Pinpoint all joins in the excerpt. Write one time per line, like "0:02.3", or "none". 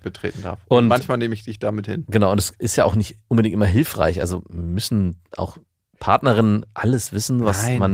none